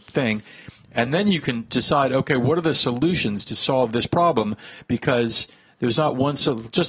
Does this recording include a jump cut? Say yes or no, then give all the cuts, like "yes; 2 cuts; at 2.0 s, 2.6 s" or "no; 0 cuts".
no; 0 cuts